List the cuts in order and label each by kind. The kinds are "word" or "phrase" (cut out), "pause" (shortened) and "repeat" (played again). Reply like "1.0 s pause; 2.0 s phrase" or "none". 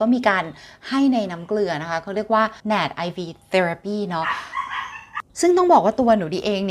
2.6 s pause; 3.4 s pause; 5.3 s pause